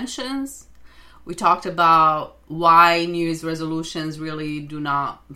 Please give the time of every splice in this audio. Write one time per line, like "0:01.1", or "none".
none